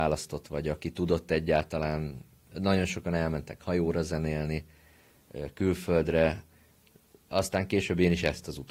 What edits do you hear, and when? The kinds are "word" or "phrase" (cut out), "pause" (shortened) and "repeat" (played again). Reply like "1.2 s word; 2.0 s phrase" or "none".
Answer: none